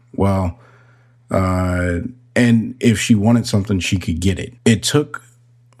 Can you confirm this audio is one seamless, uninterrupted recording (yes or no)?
no